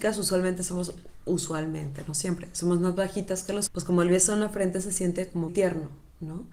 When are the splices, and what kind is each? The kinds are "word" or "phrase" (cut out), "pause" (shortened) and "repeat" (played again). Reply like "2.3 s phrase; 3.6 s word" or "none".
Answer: 3.7 s word; 5.5 s word